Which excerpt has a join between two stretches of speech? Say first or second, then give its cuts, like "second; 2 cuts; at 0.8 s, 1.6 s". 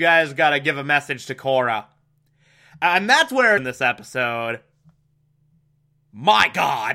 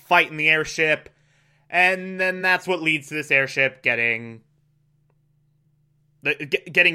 first; 1 cut; at 3.6 s